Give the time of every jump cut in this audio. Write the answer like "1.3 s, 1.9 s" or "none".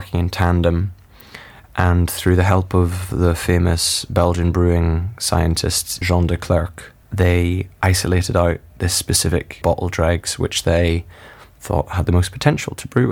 6.0 s, 7.0 s, 9.6 s